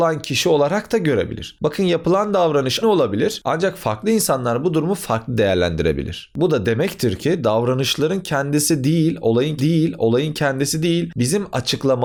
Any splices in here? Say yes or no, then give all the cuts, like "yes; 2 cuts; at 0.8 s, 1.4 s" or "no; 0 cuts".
yes; 2 cuts; at 2.8 s, 9.6 s